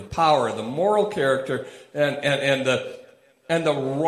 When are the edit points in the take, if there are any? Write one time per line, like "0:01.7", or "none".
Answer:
none

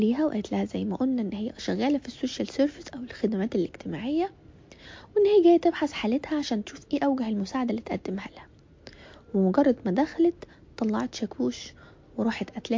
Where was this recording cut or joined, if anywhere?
none

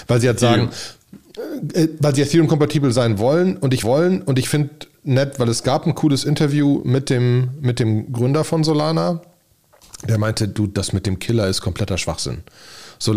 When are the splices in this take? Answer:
0:03.8

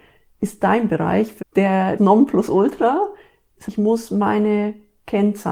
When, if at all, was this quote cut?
0:01.4
0:02.0
0:03.7

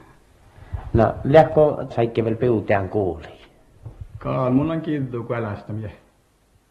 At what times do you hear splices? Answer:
0:01.9

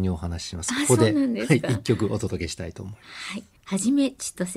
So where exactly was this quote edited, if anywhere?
0:03.6

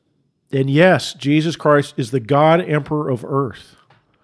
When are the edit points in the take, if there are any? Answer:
none

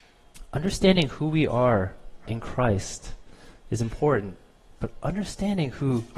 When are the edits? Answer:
0:02.3

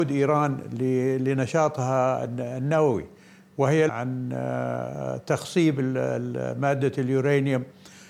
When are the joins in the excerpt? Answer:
0:03.9

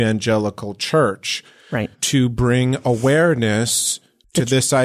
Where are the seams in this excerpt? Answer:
0:01.9

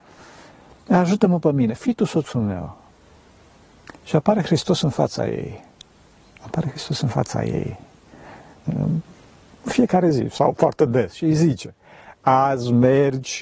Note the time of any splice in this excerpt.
none

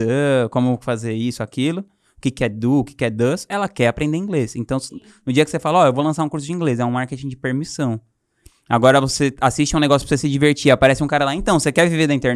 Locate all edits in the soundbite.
none

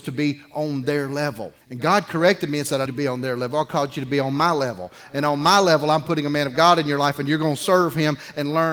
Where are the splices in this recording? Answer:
0:01.6
0:02.9

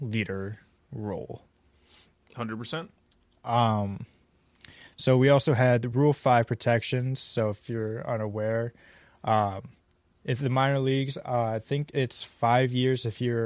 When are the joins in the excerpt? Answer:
none

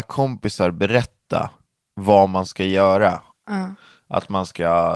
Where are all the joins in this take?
0:03.3

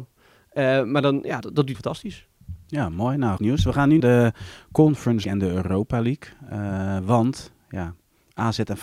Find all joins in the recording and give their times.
0:01.4
0:01.7
0:03.4
0:04.0
0:05.2

